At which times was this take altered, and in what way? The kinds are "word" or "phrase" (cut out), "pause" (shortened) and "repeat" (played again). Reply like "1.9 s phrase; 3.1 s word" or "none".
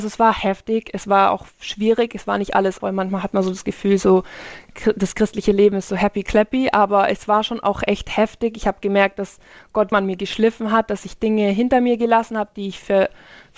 2.8 s word; 9.9 s phrase